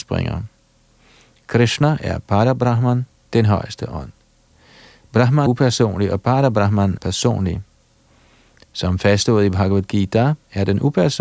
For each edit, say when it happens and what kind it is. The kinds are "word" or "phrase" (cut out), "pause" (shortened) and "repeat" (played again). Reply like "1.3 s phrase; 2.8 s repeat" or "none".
5.5 s word; 7.0 s word